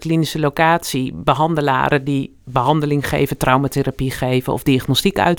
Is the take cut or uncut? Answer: uncut